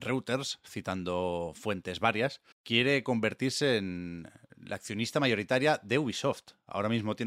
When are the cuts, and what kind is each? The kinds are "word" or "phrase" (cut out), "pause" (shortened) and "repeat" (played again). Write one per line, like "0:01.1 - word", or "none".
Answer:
0:02.5 - pause